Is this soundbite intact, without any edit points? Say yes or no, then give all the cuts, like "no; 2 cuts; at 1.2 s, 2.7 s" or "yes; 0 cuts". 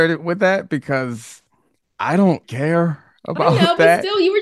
no; 1 cut; at 2.4 s